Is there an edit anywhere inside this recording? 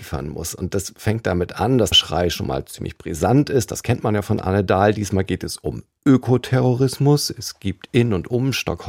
yes; 1 cut; at 1.9 s

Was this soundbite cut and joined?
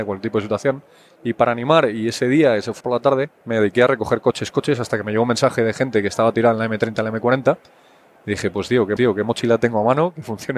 yes; 4 cuts; at 2.8 s, 3.4 s, 4.5 s, 9.0 s

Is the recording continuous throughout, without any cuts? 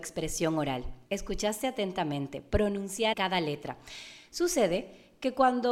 no; 2 cuts; at 1.1 s, 3.1 s

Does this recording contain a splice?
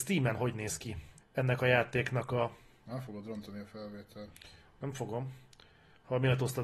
yes; 1 cut; at 1.2 s

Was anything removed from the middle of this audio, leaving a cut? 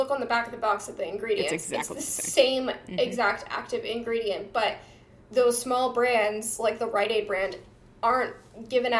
no; 0 cuts

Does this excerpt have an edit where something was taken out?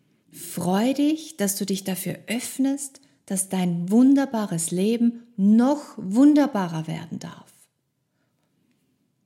no; 0 cuts

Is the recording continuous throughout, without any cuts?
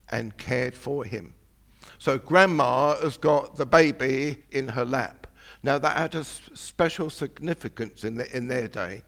no; 1 cut; at 4.4 s

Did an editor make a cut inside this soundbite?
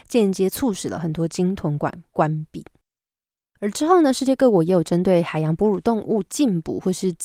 no; 0 cuts

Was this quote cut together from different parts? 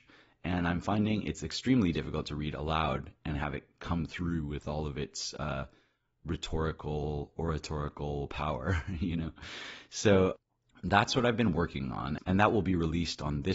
no; 0 cuts

